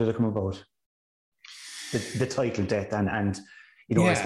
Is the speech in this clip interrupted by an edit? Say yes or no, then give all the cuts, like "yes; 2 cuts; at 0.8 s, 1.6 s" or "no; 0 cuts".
no; 0 cuts